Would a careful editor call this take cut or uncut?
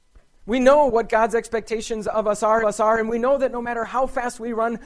cut